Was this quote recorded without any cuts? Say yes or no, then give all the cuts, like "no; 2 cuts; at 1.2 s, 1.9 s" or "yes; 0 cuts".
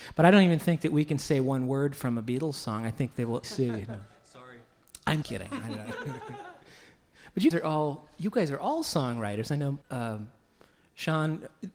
no; 4 cuts; at 3.4 s, 5.2 s, 7.5 s, 9.8 s